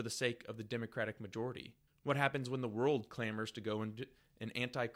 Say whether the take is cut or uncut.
cut